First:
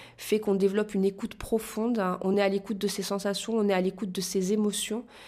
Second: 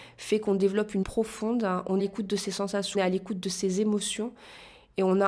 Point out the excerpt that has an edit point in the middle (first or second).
second